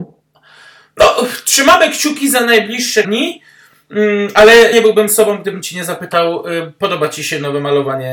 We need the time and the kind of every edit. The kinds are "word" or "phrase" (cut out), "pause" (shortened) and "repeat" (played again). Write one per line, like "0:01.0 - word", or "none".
0:03.0 - word
0:04.7 - word